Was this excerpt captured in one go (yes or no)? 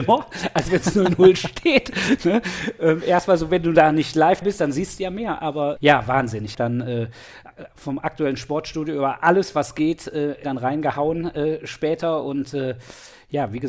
no